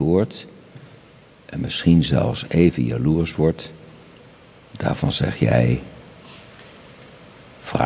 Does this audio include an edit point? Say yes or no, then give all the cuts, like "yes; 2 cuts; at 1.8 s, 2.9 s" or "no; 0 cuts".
no; 0 cuts